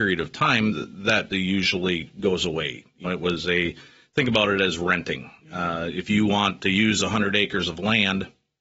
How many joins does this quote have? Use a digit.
2